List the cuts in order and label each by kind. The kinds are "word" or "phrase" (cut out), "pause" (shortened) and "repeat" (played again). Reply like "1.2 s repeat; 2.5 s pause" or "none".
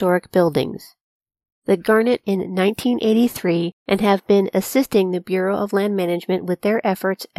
2.2 s phrase; 3.8 s pause